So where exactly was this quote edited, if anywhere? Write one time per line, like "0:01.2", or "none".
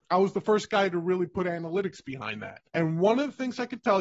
0:02.7